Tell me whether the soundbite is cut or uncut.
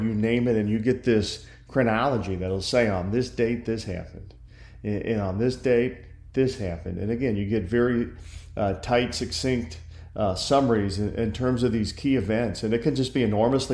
uncut